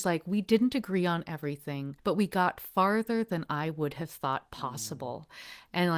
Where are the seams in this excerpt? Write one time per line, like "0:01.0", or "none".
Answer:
0:02.0

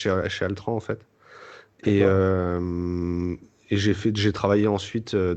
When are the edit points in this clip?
none

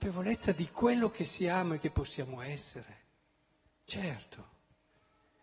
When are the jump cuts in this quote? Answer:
none

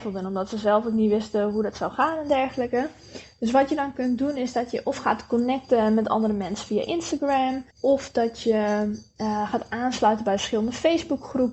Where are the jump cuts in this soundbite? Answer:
0:07.7

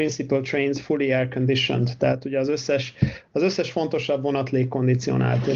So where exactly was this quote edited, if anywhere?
none

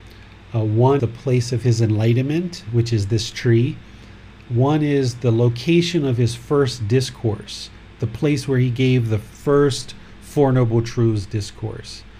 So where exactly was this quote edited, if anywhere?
0:01.0

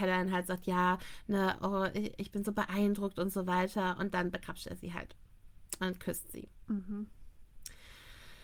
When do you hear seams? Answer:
none

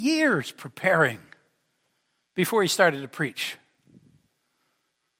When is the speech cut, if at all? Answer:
none

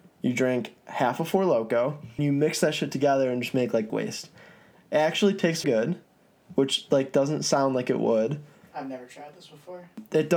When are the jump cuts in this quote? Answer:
0:02.2
0:03.9
0:05.6

